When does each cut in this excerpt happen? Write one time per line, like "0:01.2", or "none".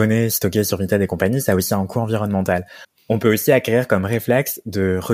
none